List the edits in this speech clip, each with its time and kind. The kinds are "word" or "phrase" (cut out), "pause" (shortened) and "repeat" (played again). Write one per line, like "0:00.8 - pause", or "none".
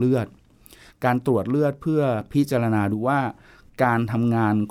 none